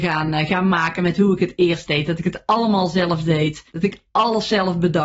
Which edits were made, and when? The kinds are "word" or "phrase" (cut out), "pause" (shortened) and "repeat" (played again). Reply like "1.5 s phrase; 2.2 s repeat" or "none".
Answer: 3.7 s pause